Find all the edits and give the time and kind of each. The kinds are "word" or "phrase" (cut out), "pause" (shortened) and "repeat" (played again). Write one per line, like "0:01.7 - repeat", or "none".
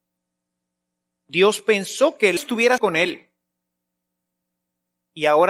0:02.4 - word
0:02.8 - word